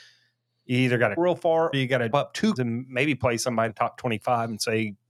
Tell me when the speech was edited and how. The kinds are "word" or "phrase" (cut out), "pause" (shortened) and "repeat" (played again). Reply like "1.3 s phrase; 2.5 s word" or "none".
1.2 s word; 1.7 s word; 2.1 s word; 2.6 s word; 3.7 s word